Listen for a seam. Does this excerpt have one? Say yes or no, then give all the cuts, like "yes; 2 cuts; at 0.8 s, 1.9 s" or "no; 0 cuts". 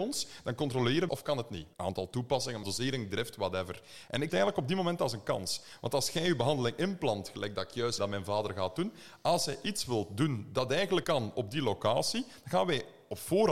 yes; 6 cuts; at 1.1 s, 1.7 s, 2.6 s, 4.3 s, 8.0 s, 11.0 s